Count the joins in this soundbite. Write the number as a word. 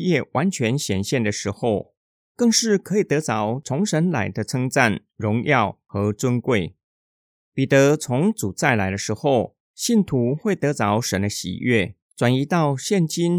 zero